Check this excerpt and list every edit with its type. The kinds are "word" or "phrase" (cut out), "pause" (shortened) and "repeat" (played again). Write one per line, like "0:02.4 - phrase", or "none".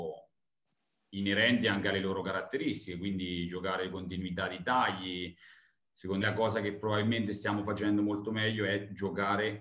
0:06.2 - word